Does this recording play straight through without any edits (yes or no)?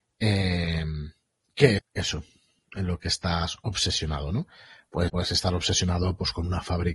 no